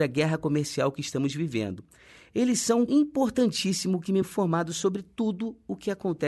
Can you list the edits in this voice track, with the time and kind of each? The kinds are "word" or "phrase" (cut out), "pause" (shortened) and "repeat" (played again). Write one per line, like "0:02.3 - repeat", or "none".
0:02.9 - word
0:04.2 - word